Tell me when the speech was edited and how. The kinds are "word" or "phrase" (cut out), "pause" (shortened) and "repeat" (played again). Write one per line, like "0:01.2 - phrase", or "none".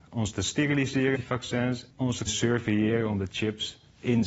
0:01.2 - word
0:01.9 - word
0:02.3 - word
0:03.3 - word